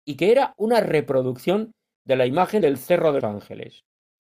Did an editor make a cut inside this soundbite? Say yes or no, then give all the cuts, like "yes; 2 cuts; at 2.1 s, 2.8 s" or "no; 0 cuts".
yes; 2 cuts; at 2.6 s, 3.2 s